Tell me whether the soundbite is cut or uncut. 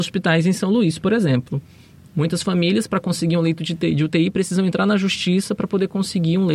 uncut